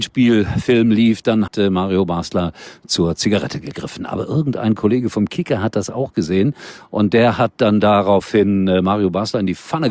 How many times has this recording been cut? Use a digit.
1